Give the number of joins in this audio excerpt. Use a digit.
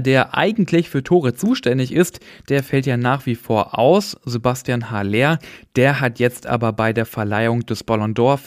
0